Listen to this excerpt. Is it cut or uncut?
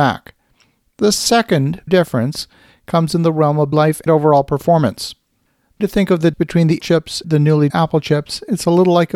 cut